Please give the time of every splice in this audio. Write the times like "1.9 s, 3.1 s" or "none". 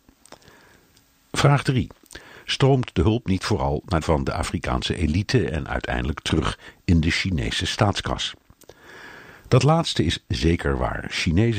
4.0 s